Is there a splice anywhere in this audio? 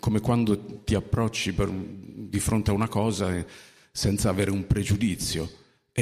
no; 0 cuts

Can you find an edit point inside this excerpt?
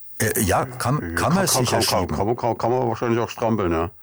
no; 0 cuts

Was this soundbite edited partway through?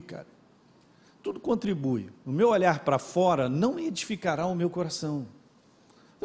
no; 0 cuts

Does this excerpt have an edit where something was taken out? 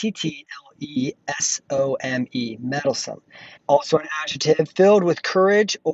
yes; 1 cut; at 3.6 s

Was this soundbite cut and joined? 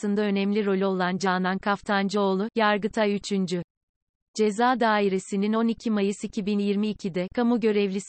no; 0 cuts

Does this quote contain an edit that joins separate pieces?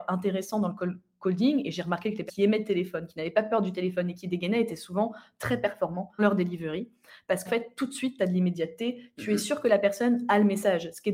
yes; 3 cuts; at 2.3 s, 6.2 s, 7.5 s

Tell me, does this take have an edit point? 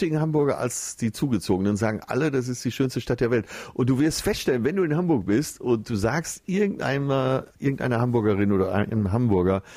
no; 0 cuts

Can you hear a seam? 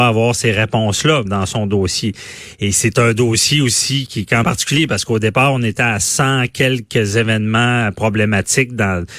yes; 3 cuts; at 1.3 s, 4.1 s, 4.4 s

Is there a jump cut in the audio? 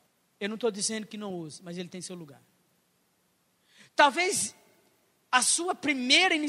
no; 0 cuts

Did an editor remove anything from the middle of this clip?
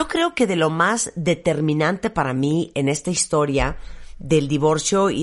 no; 0 cuts

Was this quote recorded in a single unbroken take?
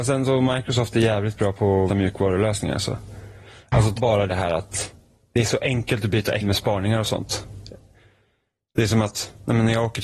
no; 4 cuts; at 1.9 s, 3.9 s, 4.3 s, 6.4 s

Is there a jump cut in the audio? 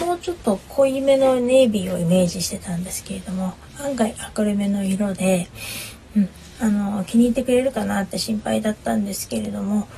no; 0 cuts

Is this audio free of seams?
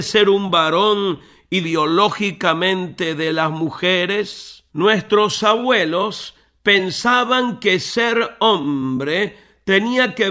no; 2 cuts; at 1.6 s, 4.7 s

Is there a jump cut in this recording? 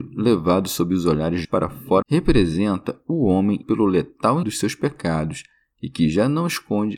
yes; 4 cuts; at 1.4 s, 2.0 s, 3.6 s, 4.4 s

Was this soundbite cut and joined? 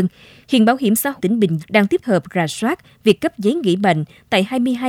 yes; 3 cuts; at 1.2 s, 1.6 s, 2.0 s

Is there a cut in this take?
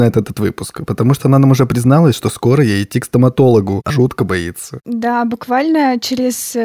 yes; 1 cut; at 3.9 s

